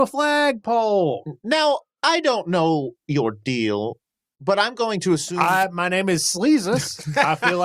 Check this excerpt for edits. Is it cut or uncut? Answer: uncut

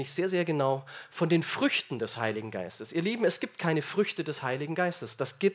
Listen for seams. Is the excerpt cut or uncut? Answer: uncut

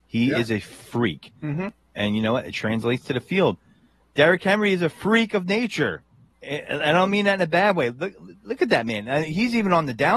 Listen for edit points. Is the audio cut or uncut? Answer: uncut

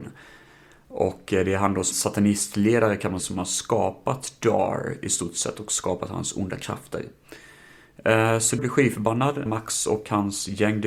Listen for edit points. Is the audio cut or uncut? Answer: cut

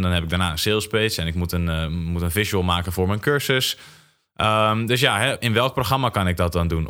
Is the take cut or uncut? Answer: uncut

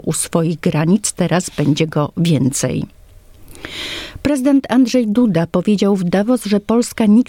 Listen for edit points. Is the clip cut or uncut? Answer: uncut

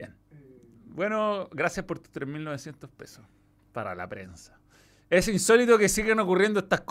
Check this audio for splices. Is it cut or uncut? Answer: uncut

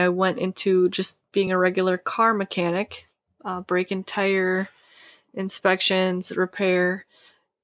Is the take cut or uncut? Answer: uncut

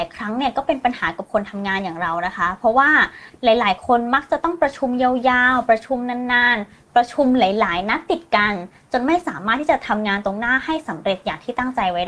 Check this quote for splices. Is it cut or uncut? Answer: uncut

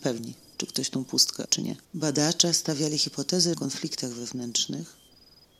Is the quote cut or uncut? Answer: cut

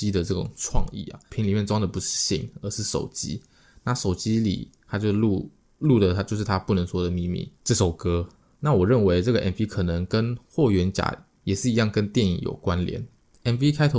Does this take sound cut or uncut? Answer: uncut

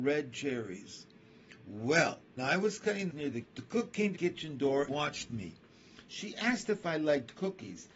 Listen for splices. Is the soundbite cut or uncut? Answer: cut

